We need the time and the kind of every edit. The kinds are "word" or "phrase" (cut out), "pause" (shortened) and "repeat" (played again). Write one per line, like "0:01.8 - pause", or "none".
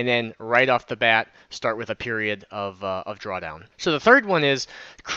0:03.7 - pause

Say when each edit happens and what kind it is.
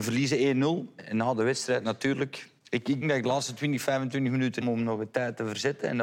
0:02.6 - pause
0:03.0 - word
0:04.6 - word

